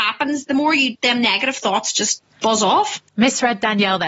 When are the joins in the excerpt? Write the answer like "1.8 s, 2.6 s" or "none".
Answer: 2.3 s